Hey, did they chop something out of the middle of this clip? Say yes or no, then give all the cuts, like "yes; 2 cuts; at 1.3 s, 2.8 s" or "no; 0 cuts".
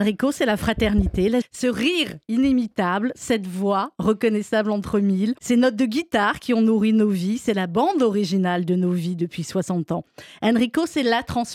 yes; 2 cuts; at 1.4 s, 5.4 s